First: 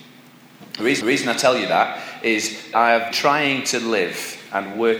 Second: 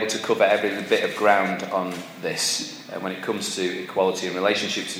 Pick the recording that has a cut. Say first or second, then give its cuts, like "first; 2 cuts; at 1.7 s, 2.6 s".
first; 3 cuts; at 1.0 s, 2.7 s, 3.1 s